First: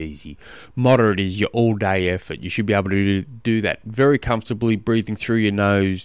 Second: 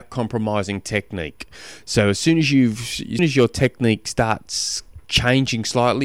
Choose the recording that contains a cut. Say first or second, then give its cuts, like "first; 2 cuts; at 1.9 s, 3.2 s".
second; 2 cuts; at 3.2 s, 5.0 s